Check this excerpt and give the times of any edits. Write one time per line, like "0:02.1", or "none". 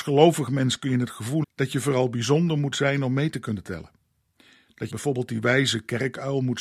0:01.4
0:04.9